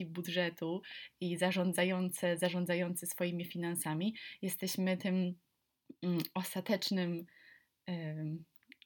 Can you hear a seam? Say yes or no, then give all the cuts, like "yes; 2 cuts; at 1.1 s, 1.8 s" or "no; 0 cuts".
no; 0 cuts